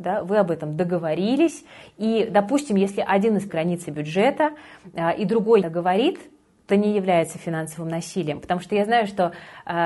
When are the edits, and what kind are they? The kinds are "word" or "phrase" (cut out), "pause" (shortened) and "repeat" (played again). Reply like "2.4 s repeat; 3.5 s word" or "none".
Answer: 3.5 s phrase; 5.6 s phrase; 6.7 s phrase